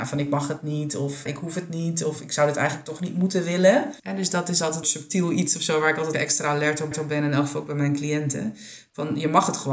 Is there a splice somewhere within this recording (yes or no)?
yes